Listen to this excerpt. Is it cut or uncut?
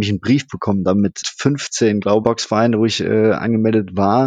cut